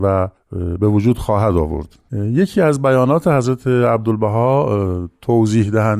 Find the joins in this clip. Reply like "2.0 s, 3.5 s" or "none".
none